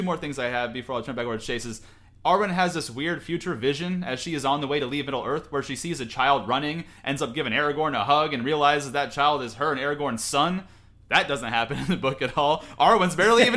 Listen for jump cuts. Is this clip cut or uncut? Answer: uncut